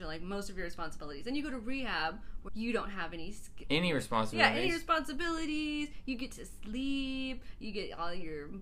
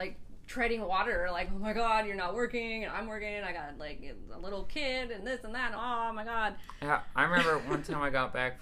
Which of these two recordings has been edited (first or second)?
first